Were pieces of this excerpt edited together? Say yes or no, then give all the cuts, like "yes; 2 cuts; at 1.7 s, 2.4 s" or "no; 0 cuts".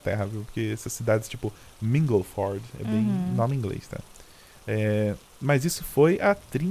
no; 0 cuts